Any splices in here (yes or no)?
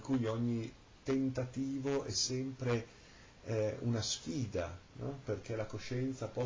no